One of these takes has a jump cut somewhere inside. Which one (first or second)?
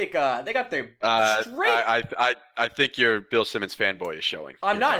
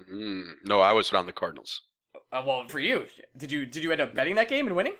second